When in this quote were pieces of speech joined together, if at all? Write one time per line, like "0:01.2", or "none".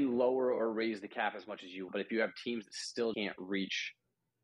0:01.9
0:03.1

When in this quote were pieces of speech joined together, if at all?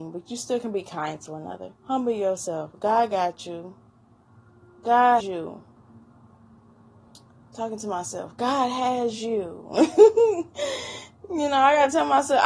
0:01.8
0:05.2

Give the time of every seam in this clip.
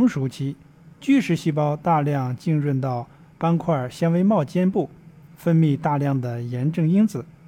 none

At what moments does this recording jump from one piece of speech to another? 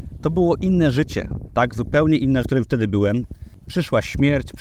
0:02.4

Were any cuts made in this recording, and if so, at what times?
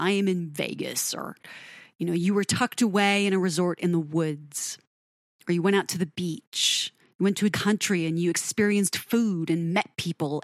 0:07.5

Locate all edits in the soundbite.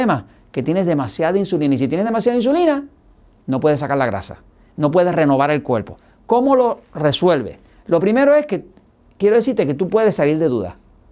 none

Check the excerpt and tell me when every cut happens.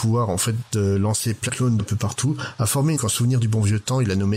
0:01.5
0:01.8
0:03.0

